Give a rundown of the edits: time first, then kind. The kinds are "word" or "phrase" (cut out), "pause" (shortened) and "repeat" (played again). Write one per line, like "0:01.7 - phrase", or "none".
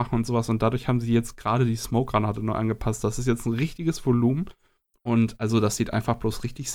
none

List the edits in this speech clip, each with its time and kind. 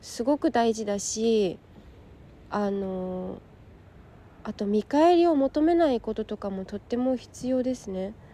none

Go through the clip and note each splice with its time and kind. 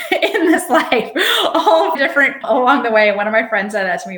0:01.9 - word
0:02.4 - word

